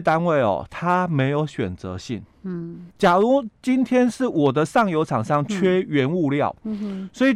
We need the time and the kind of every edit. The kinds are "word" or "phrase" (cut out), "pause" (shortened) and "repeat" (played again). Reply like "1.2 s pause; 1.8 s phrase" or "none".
2.9 s pause